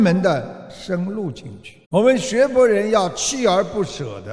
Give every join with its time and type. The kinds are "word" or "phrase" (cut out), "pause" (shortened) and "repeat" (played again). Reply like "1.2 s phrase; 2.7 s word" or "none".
1.8 s pause

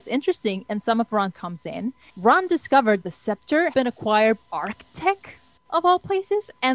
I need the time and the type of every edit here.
1.3 s word; 2.1 s pause; 3.0 s word; 3.7 s word; 4.4 s word

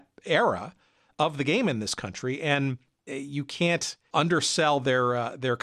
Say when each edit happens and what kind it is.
3.1 s word

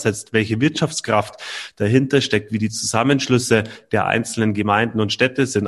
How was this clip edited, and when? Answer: none

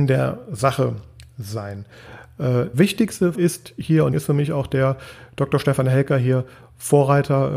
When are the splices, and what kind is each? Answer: 2.7 s word; 3.3 s word; 4.1 s word

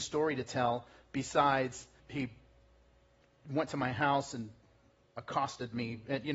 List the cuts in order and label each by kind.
2.0 s word

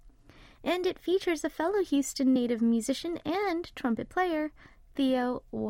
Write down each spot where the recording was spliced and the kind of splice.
none

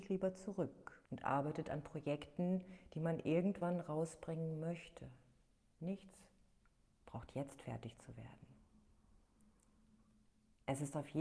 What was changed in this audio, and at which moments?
1.1 s pause

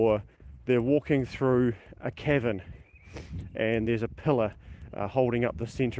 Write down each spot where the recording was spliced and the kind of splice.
none

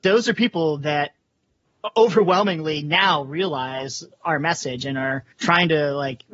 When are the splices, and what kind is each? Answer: 5.3 s pause

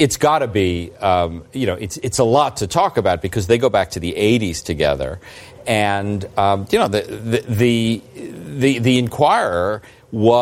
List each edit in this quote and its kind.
none

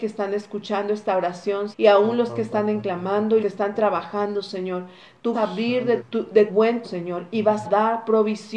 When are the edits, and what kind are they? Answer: 1.7 s word; 2.8 s word; 3.4 s word; 5.3 s word; 6.0 s word; 6.5 s word; 6.8 s word; 7.6 s word

